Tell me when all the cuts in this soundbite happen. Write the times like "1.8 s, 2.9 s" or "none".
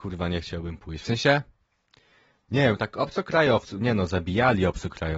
none